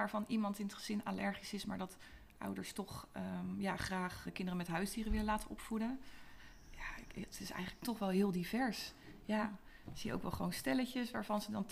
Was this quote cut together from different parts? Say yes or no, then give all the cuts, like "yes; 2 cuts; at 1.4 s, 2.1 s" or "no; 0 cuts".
yes; 1 cut; at 4.2 s